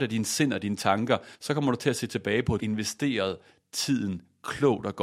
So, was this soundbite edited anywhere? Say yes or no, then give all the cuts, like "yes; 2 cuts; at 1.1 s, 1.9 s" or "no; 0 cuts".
yes; 2 cuts; at 1.3 s, 2.6 s